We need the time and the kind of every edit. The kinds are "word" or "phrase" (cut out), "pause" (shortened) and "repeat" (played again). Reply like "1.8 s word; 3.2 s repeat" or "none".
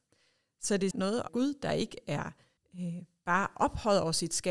0.9 s word; 1.3 s phrase; 2.6 s pause